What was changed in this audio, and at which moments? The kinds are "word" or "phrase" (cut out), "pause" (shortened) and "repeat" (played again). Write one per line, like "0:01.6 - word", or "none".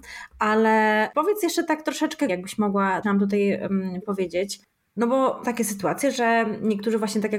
0:02.3 - word
0:03.0 - word
0:04.0 - word
0:05.4 - word